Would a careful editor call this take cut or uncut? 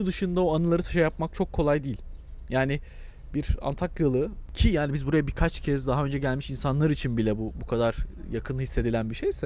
uncut